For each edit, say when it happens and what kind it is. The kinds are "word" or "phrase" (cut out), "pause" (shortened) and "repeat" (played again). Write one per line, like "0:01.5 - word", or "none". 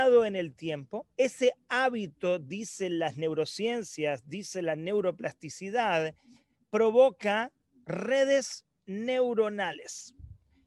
0:01.1 - pause